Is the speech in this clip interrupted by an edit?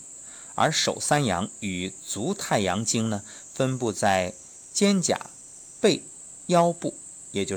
no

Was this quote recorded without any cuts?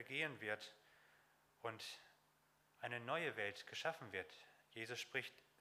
yes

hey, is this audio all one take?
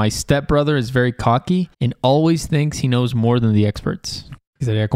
no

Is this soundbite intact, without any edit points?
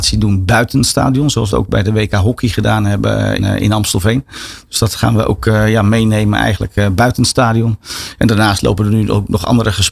no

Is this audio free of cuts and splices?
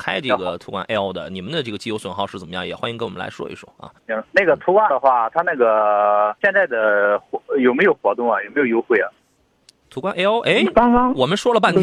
no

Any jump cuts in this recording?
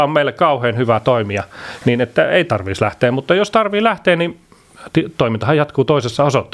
no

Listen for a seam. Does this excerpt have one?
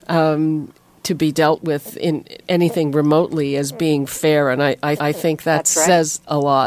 yes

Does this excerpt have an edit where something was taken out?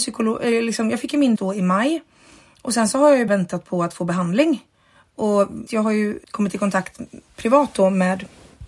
yes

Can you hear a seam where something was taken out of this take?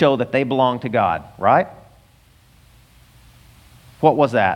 no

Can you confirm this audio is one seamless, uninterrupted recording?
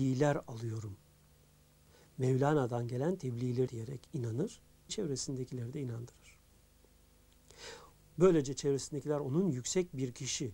no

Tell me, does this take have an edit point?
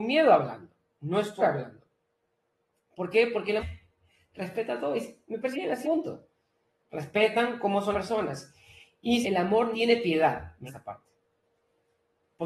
yes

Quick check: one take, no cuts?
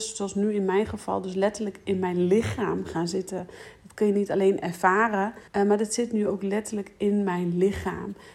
no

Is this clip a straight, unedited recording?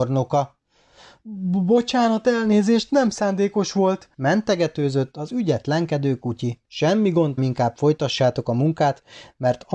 no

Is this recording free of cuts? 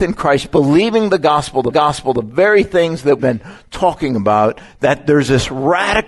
no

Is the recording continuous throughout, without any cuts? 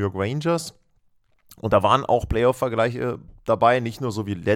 yes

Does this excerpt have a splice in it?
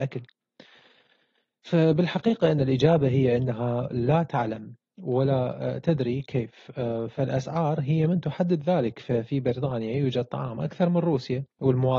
no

